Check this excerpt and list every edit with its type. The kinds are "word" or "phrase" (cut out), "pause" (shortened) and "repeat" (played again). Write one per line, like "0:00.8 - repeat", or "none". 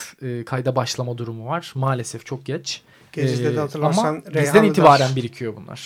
0:02.9 - pause